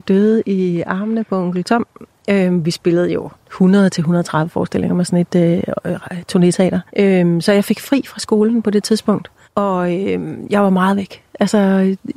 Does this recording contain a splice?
yes; 2 cuts; at 6.9 s, 9.4 s

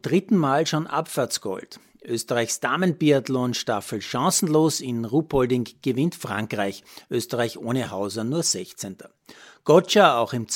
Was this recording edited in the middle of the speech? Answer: no; 0 cuts

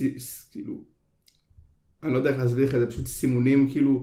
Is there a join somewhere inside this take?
no; 0 cuts

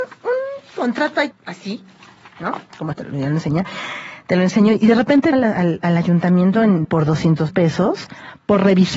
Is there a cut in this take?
yes; 6 cuts; at 1.3 s, 2.9 s, 5.3 s, 5.8 s, 6.8 s, 7.5 s

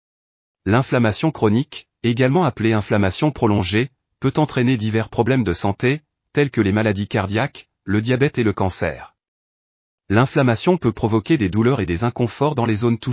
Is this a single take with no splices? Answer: yes; 0 cuts

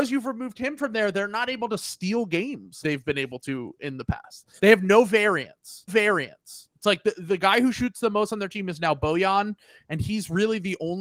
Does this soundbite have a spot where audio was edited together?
yes; 3 cuts; at 2.8 s, 4.6 s, 5.9 s

